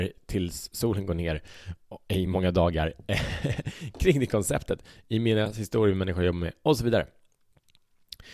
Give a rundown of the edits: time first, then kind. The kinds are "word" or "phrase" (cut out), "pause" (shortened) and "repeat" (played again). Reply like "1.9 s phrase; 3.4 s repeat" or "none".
none